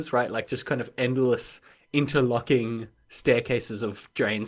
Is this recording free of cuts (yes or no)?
yes